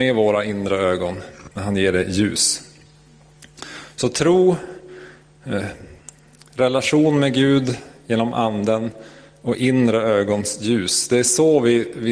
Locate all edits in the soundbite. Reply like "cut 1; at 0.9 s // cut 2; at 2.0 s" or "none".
cut 1; at 1.5 s